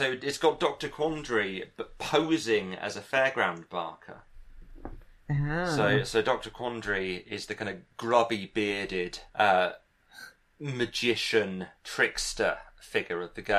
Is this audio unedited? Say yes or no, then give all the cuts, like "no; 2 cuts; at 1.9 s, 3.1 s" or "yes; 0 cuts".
no; 2 cuts; at 9.3 s, 11.8 s